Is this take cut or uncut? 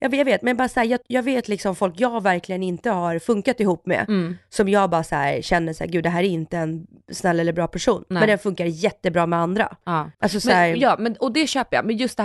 cut